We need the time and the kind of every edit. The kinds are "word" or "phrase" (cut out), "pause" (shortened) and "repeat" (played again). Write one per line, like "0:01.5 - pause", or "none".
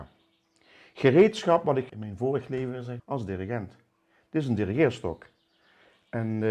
0:01.9 - word
0:03.0 - word